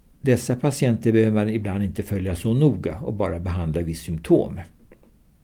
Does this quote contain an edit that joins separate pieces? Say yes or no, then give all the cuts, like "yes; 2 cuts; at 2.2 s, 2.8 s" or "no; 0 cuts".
no; 0 cuts